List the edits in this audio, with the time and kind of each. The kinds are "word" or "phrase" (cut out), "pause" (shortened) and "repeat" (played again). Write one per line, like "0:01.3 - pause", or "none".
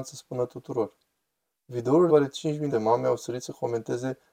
0:02.1 - word
0:02.7 - phrase